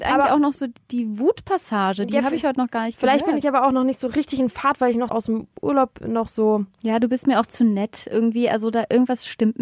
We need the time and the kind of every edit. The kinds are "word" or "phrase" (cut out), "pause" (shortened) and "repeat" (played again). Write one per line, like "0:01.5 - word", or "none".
0:05.1 - word